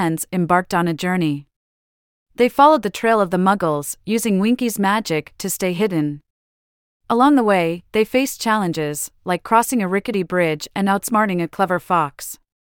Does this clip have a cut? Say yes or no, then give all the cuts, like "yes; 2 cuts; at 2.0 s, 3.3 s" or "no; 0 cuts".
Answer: no; 0 cuts